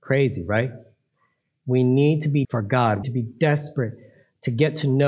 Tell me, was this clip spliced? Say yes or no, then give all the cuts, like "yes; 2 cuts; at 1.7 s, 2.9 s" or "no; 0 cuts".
yes; 2 cuts; at 2.4 s, 3.0 s